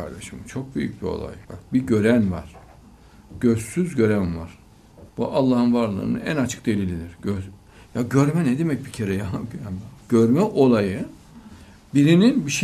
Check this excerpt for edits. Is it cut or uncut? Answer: cut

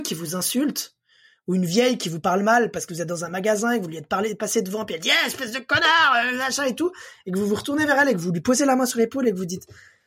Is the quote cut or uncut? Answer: uncut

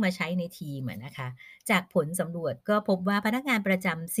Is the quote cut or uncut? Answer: cut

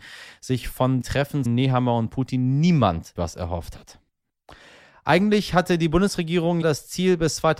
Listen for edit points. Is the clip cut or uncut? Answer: cut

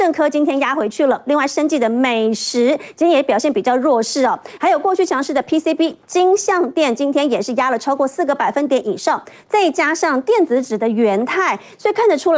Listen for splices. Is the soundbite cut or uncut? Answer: uncut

